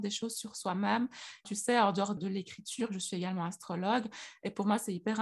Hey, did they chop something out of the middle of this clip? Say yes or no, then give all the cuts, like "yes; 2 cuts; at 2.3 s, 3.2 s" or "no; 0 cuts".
yes; 2 cuts; at 1.4 s, 2.2 s